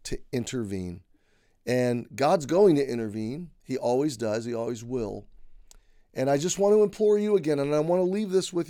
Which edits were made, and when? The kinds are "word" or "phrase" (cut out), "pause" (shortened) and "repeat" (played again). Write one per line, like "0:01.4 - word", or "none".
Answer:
none